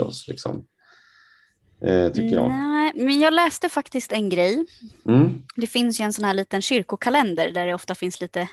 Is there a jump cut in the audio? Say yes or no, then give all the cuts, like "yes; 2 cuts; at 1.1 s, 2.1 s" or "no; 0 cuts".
no; 0 cuts